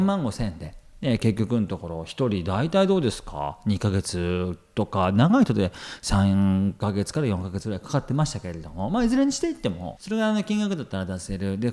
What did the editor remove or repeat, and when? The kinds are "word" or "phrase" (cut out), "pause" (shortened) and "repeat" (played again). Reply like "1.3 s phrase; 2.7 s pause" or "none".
10.0 s phrase